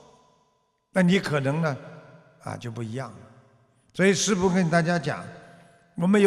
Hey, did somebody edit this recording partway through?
no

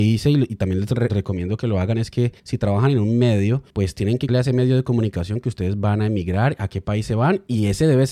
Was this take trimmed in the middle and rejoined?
yes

